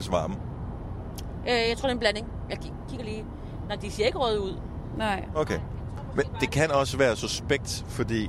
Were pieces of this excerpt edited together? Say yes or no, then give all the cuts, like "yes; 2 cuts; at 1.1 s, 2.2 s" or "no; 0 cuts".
no; 0 cuts